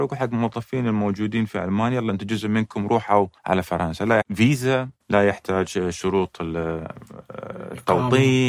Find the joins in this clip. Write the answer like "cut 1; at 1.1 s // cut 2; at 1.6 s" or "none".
cut 1; at 3.4 s // cut 2; at 4.2 s // cut 3; at 5.0 s